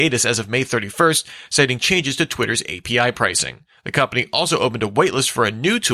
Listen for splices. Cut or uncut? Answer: cut